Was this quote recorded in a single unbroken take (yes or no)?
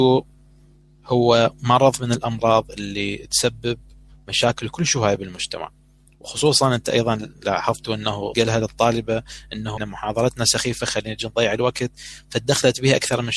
no